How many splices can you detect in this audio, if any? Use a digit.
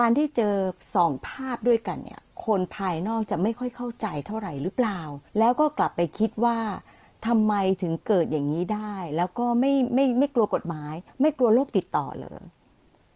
2